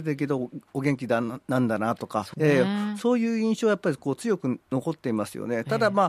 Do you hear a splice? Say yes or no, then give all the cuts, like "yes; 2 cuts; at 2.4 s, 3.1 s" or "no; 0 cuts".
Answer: yes; 1 cut; at 2.3 s